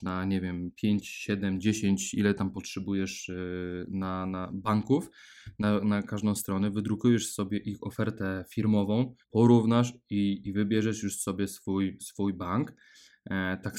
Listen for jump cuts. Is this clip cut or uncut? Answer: cut